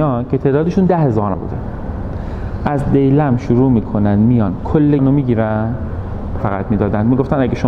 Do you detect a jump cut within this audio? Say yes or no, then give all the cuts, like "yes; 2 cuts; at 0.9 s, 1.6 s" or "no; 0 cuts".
yes; 3 cuts; at 1.3 s, 5.0 s, 6.4 s